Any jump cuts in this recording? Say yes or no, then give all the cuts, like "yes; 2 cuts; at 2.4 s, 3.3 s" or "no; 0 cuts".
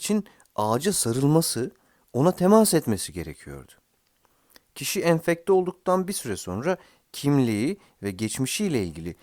no; 0 cuts